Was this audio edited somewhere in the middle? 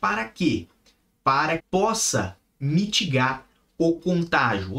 yes; 1 cut; at 1.6 s

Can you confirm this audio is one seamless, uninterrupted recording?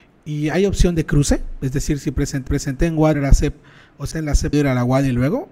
no; 4 cuts; at 2.5 s, 3.1 s, 4.1 s, 4.5 s

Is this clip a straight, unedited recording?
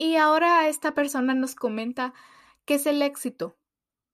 yes; 0 cuts

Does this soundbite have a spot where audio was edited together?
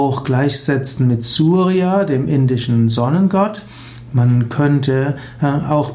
no; 0 cuts

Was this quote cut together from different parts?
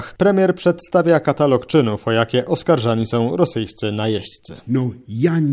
no; 0 cuts

